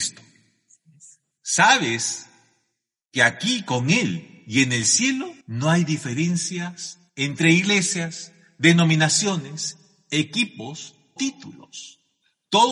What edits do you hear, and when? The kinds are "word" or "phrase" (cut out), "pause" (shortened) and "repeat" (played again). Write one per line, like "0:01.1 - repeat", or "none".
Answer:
0:05.4 - pause
0:07.1 - pause
0:11.2 - word